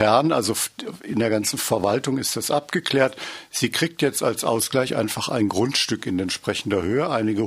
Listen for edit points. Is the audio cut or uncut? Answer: uncut